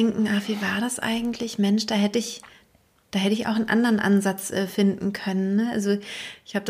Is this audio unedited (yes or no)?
yes